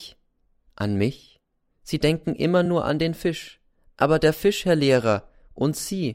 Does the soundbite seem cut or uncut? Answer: uncut